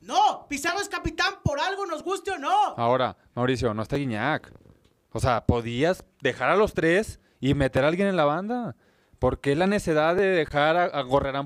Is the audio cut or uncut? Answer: uncut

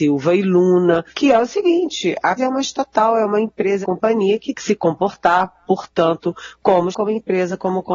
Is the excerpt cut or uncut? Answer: cut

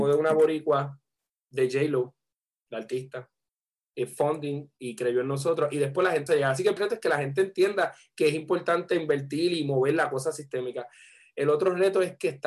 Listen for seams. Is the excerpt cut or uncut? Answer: cut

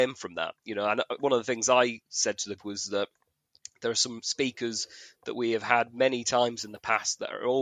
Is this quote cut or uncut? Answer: cut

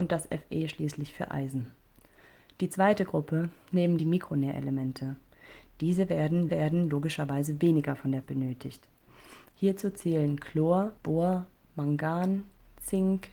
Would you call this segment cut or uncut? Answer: cut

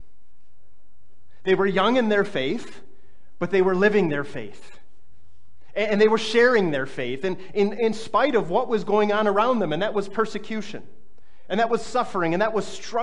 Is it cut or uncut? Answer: uncut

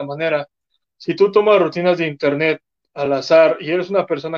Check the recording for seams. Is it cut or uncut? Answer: uncut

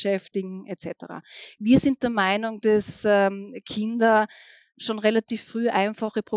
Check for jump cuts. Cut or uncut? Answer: uncut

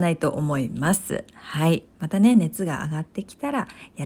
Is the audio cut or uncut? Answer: cut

